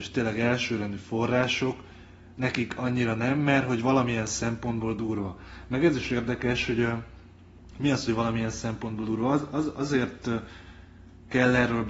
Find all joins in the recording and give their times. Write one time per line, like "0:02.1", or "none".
none